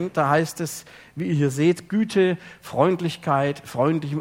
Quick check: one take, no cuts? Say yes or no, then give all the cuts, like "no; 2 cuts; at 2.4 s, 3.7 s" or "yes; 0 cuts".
yes; 0 cuts